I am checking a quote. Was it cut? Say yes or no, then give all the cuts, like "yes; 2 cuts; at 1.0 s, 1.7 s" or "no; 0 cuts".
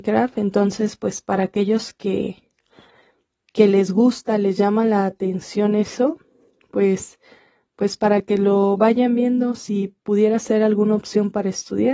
no; 0 cuts